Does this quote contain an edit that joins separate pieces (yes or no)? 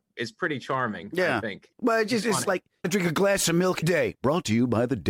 yes